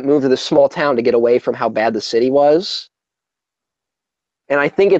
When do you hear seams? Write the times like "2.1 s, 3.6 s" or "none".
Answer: none